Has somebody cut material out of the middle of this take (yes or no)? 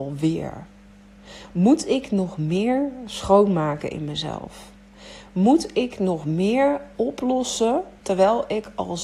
yes